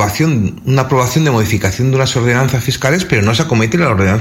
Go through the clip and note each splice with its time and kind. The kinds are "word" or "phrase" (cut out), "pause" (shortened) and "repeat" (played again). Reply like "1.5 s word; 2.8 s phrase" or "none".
none